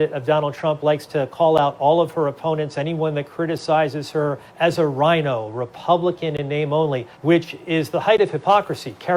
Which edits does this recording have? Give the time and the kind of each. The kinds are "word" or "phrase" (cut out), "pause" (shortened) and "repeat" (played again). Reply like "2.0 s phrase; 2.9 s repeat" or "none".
4.5 s pause; 7.1 s pause